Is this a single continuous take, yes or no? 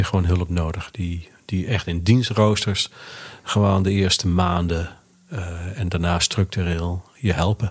yes